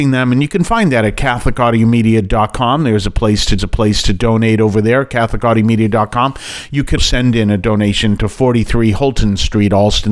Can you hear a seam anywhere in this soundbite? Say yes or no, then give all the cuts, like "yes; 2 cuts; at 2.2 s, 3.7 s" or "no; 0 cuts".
yes; 2 cuts; at 3.6 s, 7.0 s